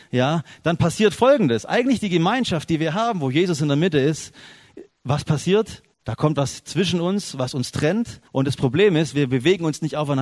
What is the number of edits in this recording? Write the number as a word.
two